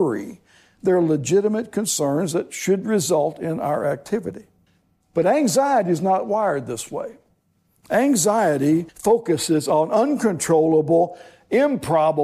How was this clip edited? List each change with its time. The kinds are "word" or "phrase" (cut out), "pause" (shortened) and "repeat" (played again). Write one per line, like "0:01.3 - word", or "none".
0:04.7 - pause
0:08.9 - pause